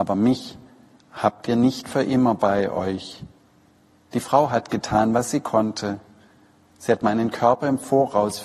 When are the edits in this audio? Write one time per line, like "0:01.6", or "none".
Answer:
none